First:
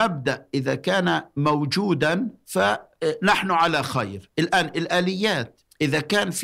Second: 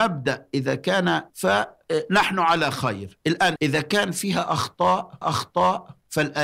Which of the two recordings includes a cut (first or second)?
second